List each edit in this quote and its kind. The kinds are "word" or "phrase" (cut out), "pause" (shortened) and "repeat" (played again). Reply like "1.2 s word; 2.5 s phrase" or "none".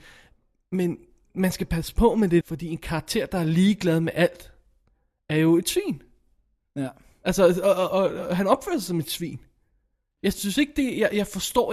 2.4 s word; 7.9 s word